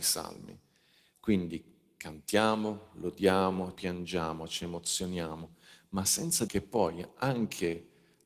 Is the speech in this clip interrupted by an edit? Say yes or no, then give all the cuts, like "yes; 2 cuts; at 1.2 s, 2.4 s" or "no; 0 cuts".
yes; 2 cuts; at 3.8 s, 6.5 s